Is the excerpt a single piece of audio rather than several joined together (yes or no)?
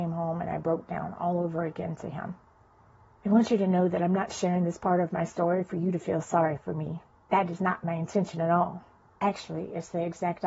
yes